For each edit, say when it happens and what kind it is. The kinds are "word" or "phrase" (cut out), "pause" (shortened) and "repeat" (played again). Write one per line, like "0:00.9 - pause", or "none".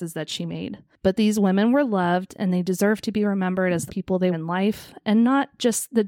0:03.9 - phrase
0:04.3 - word